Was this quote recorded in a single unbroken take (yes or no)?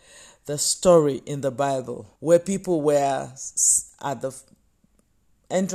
no